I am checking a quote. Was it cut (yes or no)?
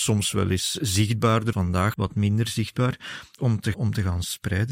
yes